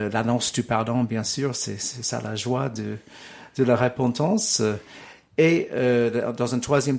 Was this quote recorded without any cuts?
yes; 0 cuts

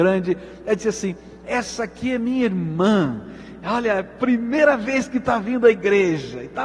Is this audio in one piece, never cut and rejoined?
yes; 0 cuts

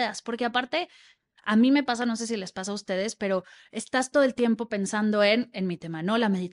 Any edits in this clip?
no; 0 cuts

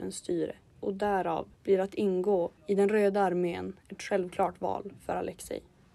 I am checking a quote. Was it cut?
yes; 2 cuts; at 1.5 s, 2.6 s

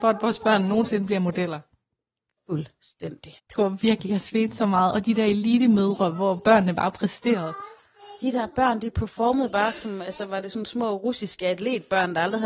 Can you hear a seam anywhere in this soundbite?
yes; 1 cut; at 3.4 s

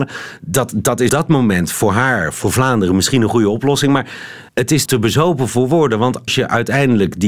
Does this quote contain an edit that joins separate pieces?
yes; 4 cuts; at 1.1 s, 4.5 s, 4.9 s, 6.3 s

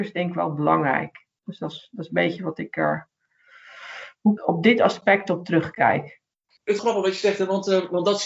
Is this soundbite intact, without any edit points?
no; 3 cuts; at 4.4 s, 6.3 s, 6.8 s

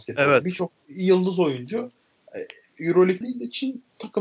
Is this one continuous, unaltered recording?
no; 1 cut; at 3.2 s

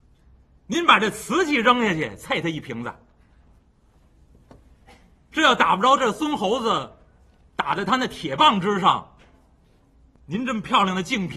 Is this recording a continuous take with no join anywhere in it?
yes; 0 cuts

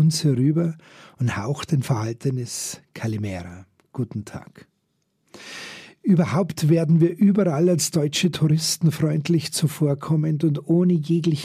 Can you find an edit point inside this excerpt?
no; 0 cuts

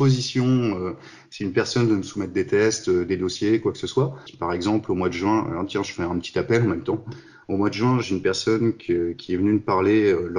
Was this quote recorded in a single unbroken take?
yes; 0 cuts

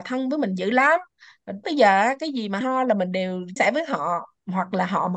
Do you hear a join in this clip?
yes; 3 cuts; at 1.6 s, 2.6 s, 3.6 s

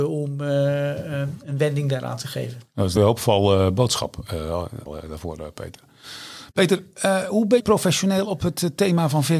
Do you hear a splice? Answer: yes; 4 cuts; at 3.0 s, 4.9 s, 6.5 s, 7.6 s

